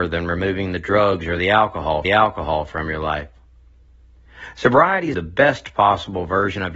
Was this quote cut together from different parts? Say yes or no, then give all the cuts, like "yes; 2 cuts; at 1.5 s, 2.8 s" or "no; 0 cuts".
yes; 2 cuts; at 2.0 s, 5.1 s